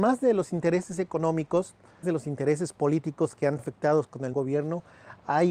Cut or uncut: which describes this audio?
cut